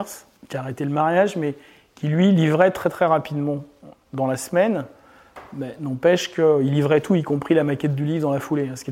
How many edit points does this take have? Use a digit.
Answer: 0